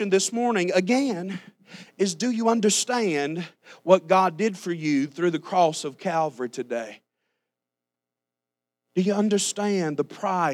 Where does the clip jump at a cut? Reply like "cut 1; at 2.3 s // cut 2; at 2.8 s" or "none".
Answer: none